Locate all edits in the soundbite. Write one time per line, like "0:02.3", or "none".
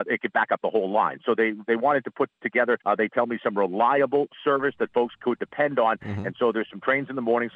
0:02.8